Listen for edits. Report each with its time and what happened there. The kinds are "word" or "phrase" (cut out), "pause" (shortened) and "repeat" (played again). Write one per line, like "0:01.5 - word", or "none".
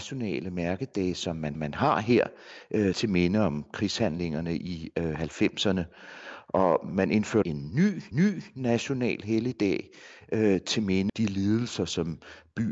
0:01.5 - repeat
0:02.9 - word
0:07.4 - word
0:08.1 - repeat
0:11.1 - word